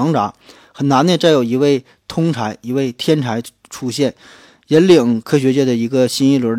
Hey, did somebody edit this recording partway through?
no; 0 cuts

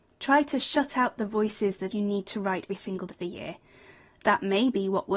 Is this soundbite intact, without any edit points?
no; 3 cuts; at 1.9 s, 2.7 s, 3.1 s

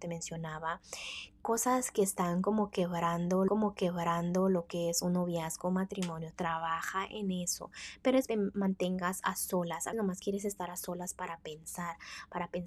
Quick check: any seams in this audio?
yes; 3 cuts; at 3.5 s, 8.3 s, 9.9 s

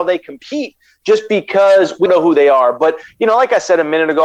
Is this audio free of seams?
no; 1 cut; at 2.1 s

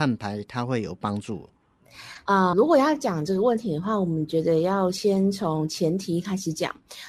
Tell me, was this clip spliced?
yes; 1 cut; at 2.5 s

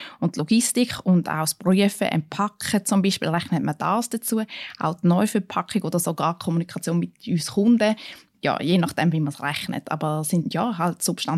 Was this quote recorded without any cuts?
yes; 0 cuts

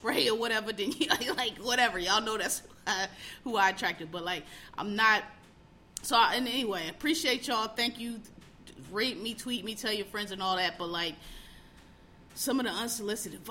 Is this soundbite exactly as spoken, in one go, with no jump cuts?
yes; 0 cuts

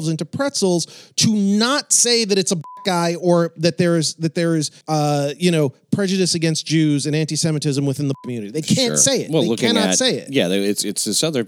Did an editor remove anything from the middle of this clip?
yes; 2 cuts; at 4.8 s, 8.2 s

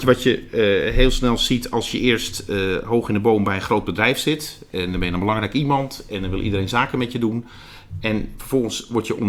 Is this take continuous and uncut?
yes; 0 cuts

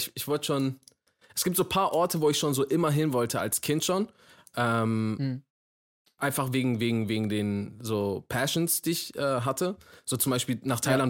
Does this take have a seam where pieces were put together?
no; 0 cuts

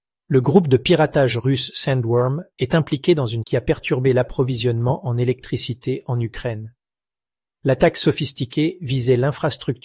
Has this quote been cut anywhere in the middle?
yes; 1 cut; at 3.4 s

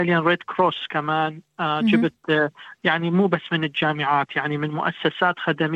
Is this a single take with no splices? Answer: yes; 0 cuts

